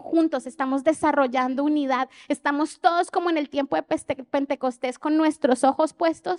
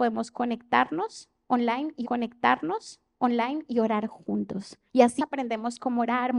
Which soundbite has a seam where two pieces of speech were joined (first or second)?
second